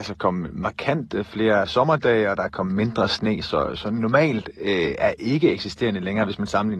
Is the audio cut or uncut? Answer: uncut